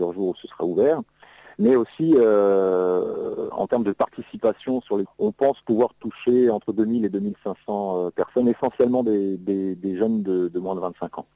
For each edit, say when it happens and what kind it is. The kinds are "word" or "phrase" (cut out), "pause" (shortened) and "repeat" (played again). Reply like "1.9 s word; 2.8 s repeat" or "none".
5.0 s phrase

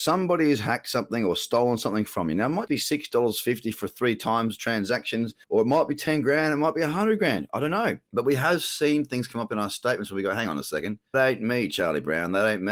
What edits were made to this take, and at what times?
2.7 s word; 5.4 s pause; 8.1 s pause; 11.1 s word

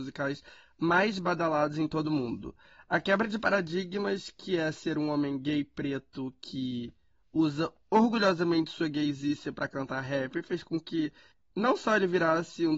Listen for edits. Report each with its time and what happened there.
none

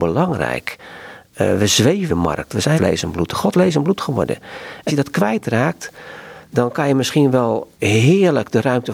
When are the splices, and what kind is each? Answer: 2.1 s phrase; 2.8 s phrase; 3.5 s word; 4.9 s word; 7.7 s pause

